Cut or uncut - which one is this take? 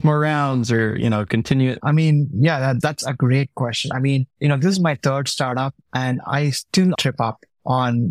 cut